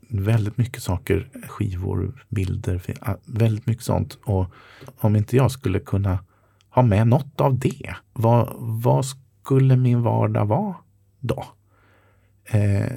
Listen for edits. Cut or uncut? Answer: cut